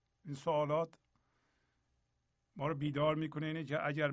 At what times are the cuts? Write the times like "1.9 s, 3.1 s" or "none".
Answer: none